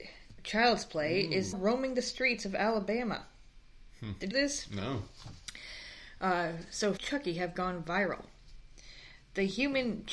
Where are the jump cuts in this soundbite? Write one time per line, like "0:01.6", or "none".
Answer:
0:01.5
0:04.3
0:07.0